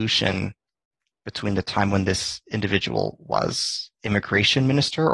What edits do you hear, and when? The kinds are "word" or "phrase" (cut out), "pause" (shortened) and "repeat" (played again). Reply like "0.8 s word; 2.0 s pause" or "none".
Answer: 3.9 s pause